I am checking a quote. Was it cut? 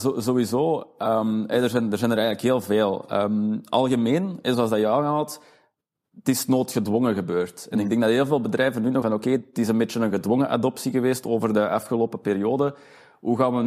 yes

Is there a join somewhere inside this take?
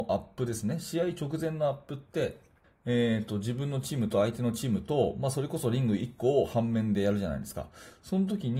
yes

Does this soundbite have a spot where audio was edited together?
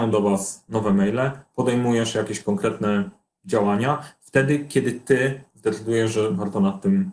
no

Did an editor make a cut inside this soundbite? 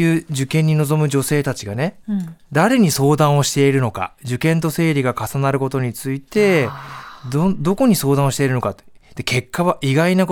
no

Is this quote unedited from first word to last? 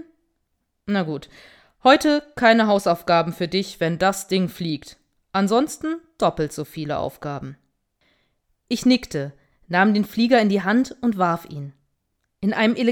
yes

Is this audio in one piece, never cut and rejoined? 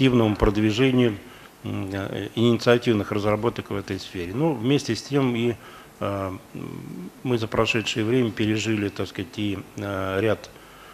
yes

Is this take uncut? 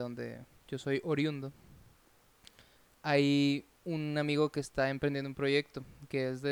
no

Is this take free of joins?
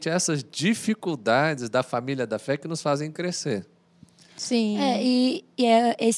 yes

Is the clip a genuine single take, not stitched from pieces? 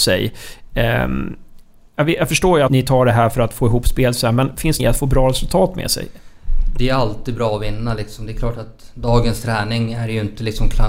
no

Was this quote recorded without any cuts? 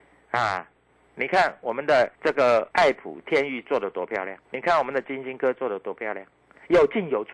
no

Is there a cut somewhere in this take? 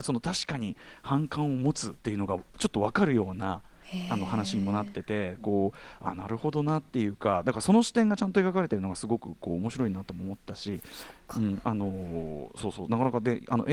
yes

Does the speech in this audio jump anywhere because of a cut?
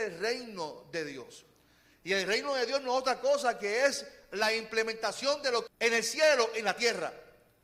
yes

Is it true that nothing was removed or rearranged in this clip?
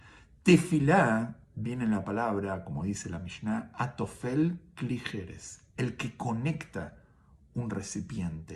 yes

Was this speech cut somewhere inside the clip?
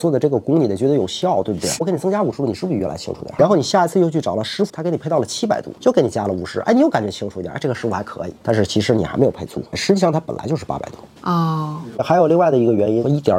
yes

